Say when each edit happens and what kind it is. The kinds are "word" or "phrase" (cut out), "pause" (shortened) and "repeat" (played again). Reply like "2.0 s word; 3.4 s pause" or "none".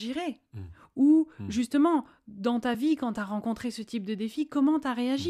none